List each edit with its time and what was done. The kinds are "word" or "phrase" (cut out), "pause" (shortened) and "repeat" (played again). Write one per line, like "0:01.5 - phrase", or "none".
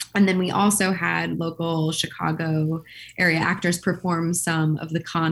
none